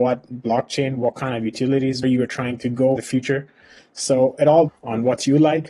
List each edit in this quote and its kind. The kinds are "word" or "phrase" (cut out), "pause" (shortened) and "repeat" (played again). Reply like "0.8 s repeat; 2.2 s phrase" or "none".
2.0 s word; 3.0 s word; 4.7 s word

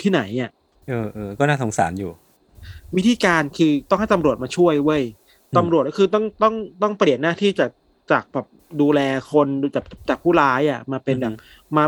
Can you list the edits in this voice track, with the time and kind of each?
none

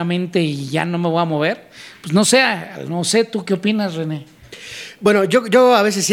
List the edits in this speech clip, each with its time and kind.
none

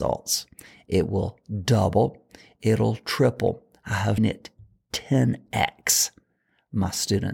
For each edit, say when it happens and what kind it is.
4.2 s word

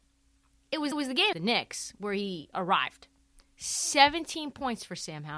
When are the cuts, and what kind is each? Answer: 0.9 s repeat; 1.3 s word

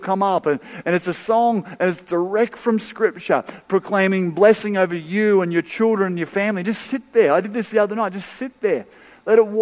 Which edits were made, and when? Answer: none

